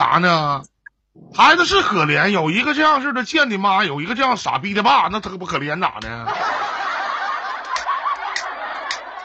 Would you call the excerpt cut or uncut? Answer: cut